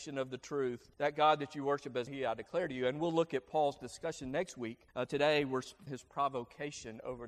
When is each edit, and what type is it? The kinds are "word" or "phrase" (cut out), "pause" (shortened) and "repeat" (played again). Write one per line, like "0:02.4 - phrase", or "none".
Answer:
0:00.9 - pause
0:02.1 - word
0:04.9 - pause
0:05.9 - phrase